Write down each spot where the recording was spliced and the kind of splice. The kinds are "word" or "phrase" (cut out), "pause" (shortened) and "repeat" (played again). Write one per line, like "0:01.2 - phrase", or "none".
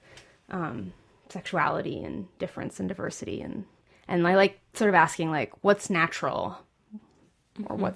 none